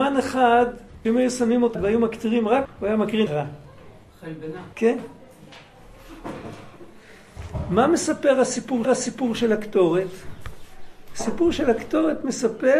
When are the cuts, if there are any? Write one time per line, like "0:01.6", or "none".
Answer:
0:01.0
0:01.7
0:02.6
0:03.3
0:04.7
0:08.8

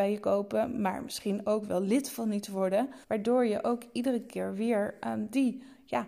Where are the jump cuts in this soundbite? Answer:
0:03.0

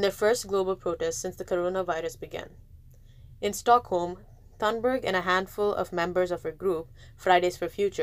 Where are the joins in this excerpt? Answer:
none

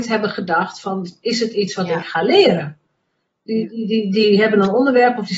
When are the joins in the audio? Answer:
none

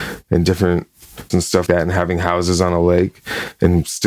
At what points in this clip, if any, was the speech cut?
0:01.3
0:01.7

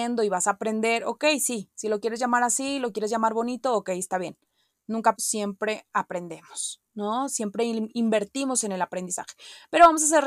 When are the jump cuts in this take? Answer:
0:05.2

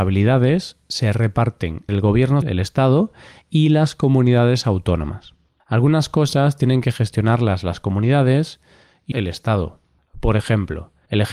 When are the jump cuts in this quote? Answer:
0:01.9
0:02.4
0:09.1

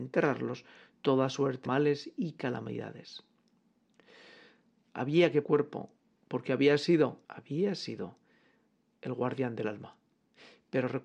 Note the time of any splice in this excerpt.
0:01.7
0:05.4
0:07.2

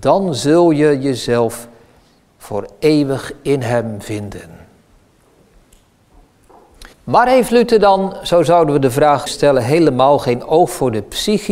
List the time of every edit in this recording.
0:06.9
0:09.3

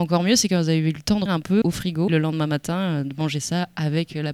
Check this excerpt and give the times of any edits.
0:01.3
0:01.6
0:02.1

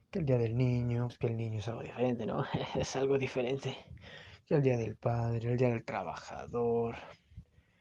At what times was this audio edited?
0:01.1

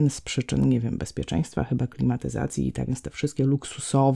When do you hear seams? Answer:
0:02.9

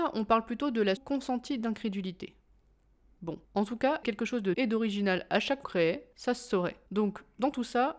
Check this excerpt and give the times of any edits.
0:01.0
0:03.4
0:04.0
0:04.5
0:05.6
0:06.1
0:06.9

